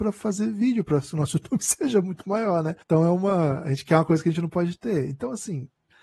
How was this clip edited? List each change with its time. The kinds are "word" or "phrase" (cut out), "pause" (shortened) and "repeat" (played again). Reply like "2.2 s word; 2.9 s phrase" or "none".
2.8 s pause